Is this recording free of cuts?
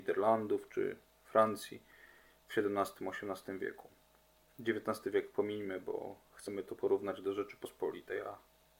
yes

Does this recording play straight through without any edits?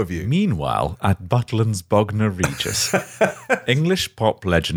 yes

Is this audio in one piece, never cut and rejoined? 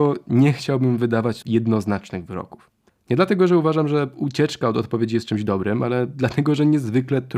no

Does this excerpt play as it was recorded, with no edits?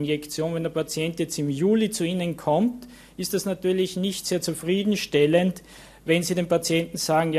yes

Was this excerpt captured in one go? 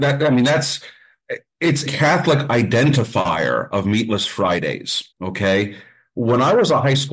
no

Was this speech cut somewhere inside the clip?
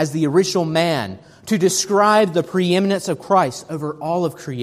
no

